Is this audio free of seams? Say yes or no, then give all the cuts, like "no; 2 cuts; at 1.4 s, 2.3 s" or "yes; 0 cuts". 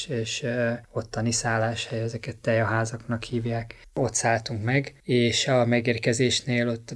yes; 0 cuts